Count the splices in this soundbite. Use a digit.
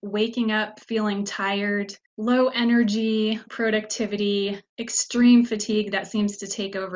3